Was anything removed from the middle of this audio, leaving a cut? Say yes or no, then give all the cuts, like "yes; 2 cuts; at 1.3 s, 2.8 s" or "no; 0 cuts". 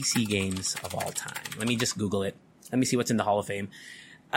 no; 0 cuts